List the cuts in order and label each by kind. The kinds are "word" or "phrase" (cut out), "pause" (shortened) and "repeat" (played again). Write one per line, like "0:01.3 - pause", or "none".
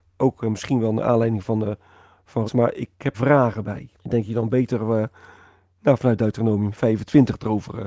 0:02.5 - word
0:03.1 - phrase
0:04.0 - pause